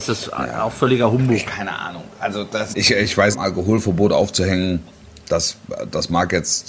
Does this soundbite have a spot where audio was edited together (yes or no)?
yes